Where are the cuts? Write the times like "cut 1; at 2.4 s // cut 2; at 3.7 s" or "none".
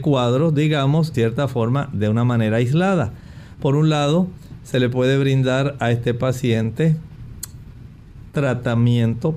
cut 1; at 1.1 s